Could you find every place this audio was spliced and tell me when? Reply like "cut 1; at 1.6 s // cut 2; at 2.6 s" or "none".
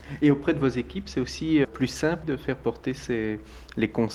cut 1; at 1.6 s // cut 2; at 2.2 s